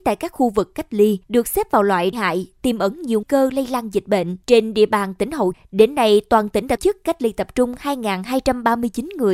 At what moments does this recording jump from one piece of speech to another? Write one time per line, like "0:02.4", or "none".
0:01.2
0:02.1
0:03.2
0:04.4
0:05.5
0:06.8